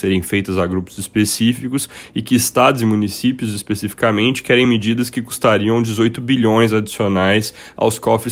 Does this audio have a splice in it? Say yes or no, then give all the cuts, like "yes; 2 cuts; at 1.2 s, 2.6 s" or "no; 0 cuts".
no; 0 cuts